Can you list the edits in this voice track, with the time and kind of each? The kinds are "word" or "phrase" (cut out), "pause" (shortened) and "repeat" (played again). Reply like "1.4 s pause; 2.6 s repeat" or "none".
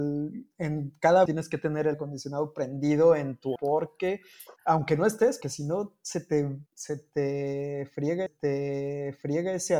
1.3 s word; 1.9 s word; 3.6 s word; 4.6 s pause; 5.4 s word; 6.7 s pause; 8.3 s repeat